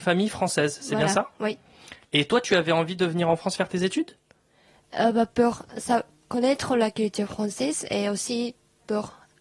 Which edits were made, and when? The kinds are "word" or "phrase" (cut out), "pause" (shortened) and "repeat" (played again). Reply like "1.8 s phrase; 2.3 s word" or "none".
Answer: none